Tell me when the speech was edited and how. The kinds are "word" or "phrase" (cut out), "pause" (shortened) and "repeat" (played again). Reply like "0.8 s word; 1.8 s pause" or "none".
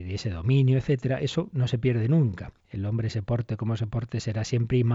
2.6 s pause